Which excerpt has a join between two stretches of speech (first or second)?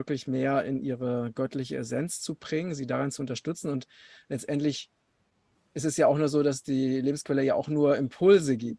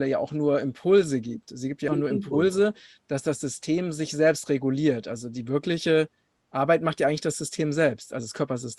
second